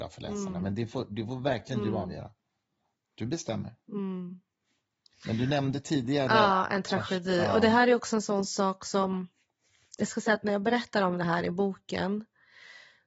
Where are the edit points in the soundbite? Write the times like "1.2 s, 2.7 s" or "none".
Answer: none